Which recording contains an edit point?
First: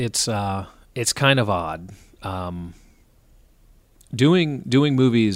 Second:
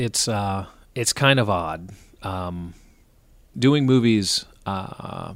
second; 1 cut; at 3.5 s

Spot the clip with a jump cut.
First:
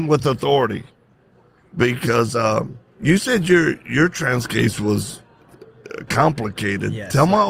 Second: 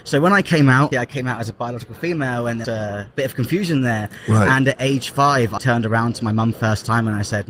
second; 4 cuts; at 0.9 s, 2.6 s, 5.6 s, 6.5 s

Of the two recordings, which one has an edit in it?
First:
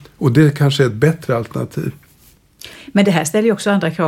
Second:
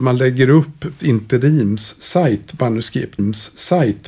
second; 2 cuts; at 1.0 s, 3.2 s

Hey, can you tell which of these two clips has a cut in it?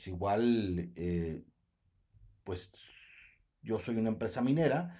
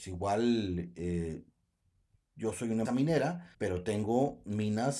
second; 3 cuts; at 2.2 s, 2.9 s, 3.5 s

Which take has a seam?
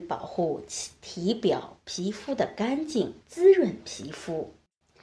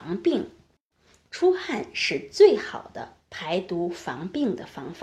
first; 1 cut; at 3.2 s

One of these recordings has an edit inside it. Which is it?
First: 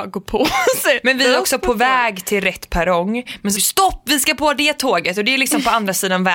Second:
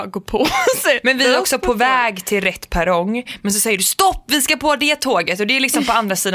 first; 1 cut; at 3.6 s

